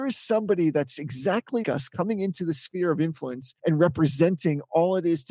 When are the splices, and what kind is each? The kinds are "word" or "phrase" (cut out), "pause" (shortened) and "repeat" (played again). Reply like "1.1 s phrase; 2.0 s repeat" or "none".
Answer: 1.6 s word; 3.6 s pause